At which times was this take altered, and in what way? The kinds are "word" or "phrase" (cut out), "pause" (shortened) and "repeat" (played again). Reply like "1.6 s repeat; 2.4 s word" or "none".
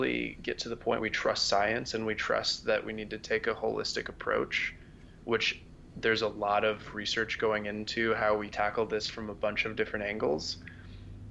1.0 s word; 8.5 s word